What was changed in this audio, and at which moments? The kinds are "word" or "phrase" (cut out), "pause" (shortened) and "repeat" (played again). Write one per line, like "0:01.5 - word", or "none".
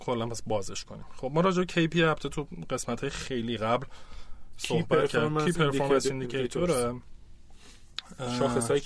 none